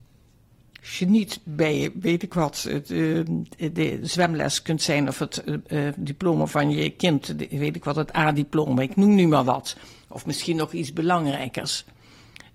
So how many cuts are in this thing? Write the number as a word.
zero